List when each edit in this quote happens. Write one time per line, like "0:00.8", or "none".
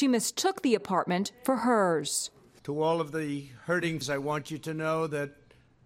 0:04.0